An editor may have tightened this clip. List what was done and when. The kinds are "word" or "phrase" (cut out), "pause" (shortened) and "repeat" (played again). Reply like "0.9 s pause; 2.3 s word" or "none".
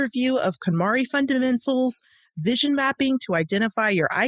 none

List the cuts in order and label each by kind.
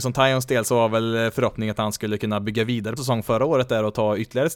3.0 s phrase

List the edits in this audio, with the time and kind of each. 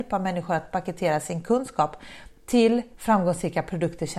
2.9 s pause

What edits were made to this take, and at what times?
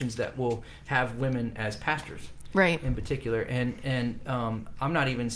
none

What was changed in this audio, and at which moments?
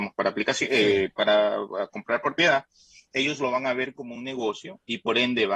none

